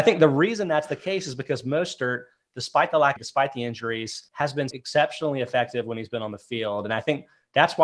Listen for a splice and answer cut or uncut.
cut